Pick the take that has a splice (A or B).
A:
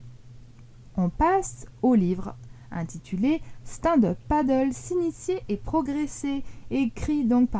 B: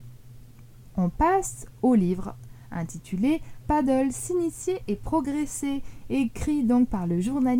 B